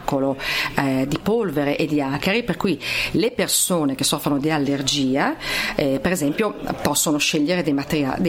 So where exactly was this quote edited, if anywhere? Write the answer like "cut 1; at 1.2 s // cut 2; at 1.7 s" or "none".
none